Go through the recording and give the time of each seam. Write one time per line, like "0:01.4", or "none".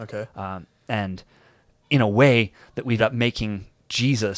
0:01.8
0:03.0